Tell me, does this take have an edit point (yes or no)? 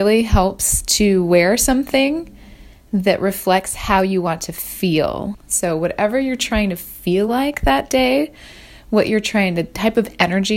no